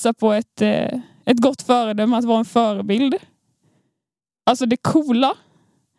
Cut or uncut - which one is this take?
uncut